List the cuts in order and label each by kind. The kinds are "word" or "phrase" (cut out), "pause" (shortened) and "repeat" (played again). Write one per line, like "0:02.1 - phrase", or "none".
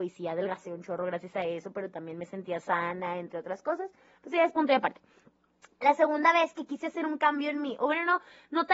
none